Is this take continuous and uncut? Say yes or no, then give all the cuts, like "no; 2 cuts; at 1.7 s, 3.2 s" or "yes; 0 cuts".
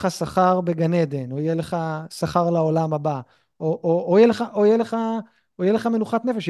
yes; 0 cuts